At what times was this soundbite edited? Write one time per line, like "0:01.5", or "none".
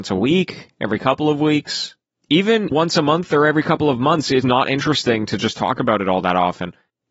0:02.7
0:04.4

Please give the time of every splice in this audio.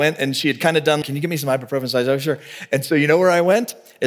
0:01.0

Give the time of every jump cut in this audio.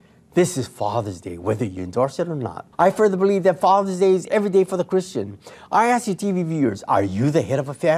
0:02.7

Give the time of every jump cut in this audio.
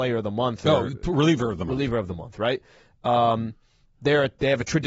none

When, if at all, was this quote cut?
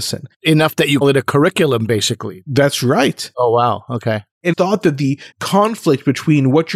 0:01.0
0:04.5
0:05.3

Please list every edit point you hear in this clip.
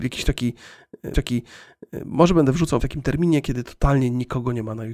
0:01.1
0:02.8

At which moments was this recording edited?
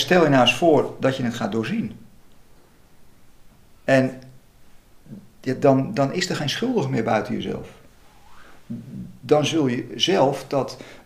none

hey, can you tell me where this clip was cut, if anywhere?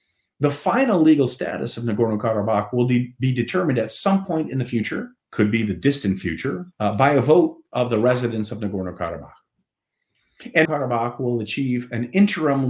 0:05.2
0:06.7
0:10.6

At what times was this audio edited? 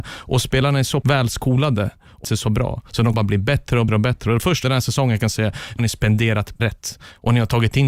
0:01.0
0:02.2
0:03.1
0:03.9
0:04.6
0:05.8
0:06.6

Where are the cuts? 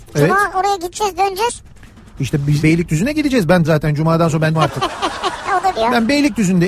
0:02.6
0:03.6
0:04.5
0:05.7

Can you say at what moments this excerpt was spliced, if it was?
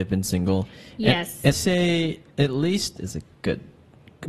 0:01.5
0:03.0

